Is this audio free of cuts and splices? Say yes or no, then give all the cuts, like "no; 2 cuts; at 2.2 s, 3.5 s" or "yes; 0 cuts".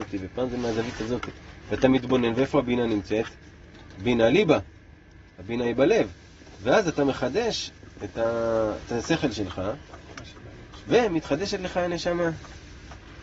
yes; 0 cuts